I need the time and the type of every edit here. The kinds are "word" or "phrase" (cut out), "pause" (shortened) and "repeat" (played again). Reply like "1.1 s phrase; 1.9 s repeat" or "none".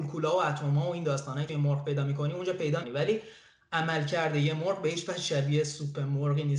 1.5 s word; 2.8 s word